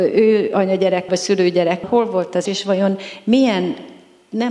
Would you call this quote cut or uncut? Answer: cut